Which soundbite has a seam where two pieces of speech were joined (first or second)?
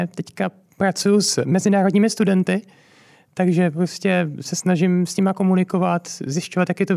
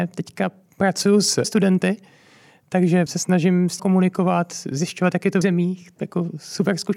second